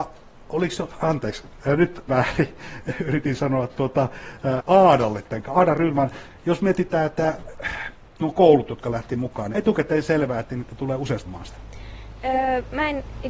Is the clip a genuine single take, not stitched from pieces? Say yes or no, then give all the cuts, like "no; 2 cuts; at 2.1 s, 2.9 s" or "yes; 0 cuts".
no; 5 cuts; at 2.1 s, 4.6 s, 5.4 s, 9.5 s, 11.3 s